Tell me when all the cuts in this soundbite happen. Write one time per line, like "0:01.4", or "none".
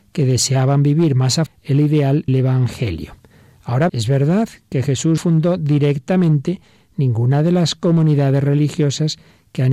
0:01.5
0:02.3
0:03.9
0:05.2